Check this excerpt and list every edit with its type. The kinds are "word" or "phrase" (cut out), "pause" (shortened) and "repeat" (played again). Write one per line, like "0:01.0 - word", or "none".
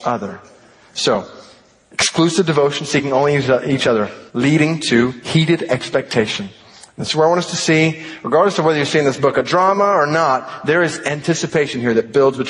0:04.3 - pause

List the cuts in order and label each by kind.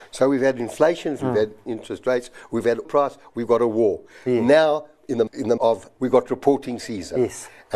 0:01.2 - word
0:01.7 - word
0:02.8 - word
0:05.3 - word
0:05.6 - word
0:06.0 - word

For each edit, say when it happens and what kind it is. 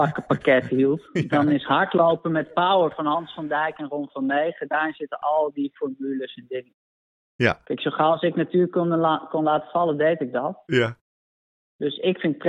none

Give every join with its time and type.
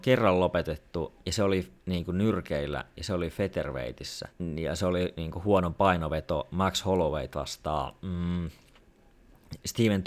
0:01.2 - pause
0:01.8 - pause
0:04.3 - pause

